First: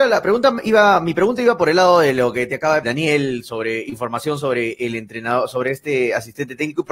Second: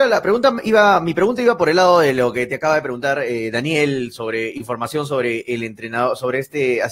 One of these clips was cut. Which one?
first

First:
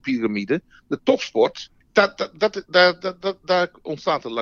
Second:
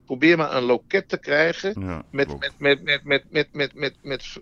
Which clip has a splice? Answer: first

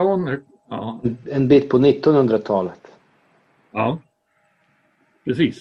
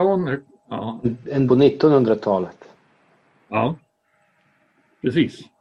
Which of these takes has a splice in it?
second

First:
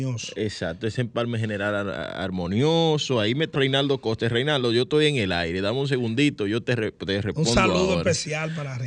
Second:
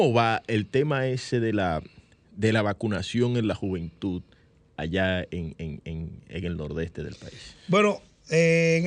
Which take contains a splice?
first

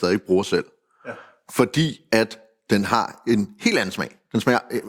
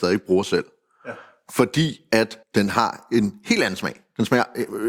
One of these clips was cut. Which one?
second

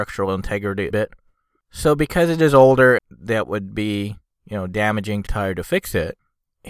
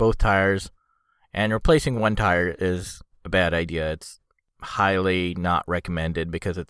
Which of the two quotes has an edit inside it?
first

